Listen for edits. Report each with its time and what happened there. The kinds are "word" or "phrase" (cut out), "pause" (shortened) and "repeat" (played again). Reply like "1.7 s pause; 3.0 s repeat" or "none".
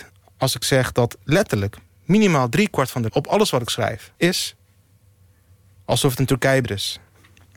3.1 s word; 4.1 s pause; 6.6 s word